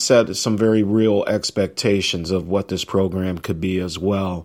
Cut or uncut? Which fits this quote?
uncut